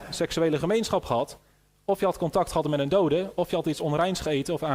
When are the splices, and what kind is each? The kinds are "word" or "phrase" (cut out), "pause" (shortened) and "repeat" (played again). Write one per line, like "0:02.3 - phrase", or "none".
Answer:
none